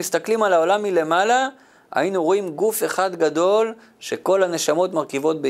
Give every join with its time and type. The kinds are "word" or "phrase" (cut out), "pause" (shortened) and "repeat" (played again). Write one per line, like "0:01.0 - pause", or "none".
none